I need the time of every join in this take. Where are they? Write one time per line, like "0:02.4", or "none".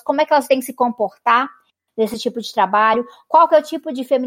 none